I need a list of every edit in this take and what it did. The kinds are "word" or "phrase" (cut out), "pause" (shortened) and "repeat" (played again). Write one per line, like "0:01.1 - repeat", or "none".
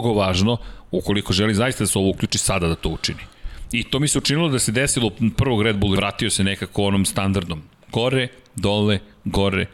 0:05.3 - word
0:06.0 - phrase